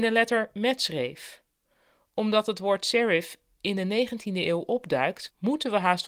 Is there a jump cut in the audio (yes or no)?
no